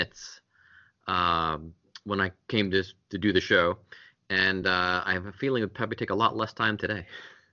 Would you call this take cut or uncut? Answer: uncut